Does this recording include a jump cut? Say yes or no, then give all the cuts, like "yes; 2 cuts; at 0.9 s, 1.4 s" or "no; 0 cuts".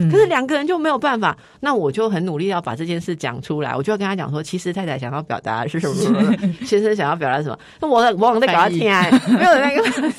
no; 0 cuts